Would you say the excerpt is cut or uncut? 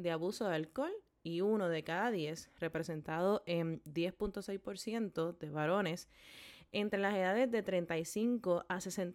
uncut